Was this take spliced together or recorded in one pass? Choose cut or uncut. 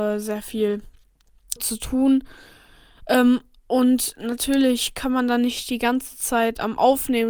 cut